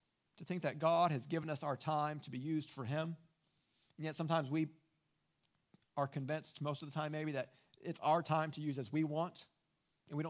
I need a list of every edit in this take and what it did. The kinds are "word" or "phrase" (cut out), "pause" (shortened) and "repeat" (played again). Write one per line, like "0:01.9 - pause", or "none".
none